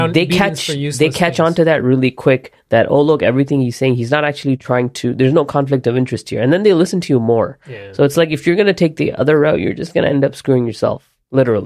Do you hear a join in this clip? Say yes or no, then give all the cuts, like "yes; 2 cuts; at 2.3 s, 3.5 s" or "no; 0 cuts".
yes; 1 cut; at 7.6 s